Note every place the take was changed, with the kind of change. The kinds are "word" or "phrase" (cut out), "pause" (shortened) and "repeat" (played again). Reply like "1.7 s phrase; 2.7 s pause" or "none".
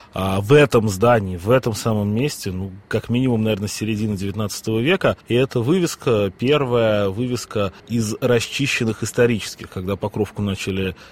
5.2 s pause; 7.8 s pause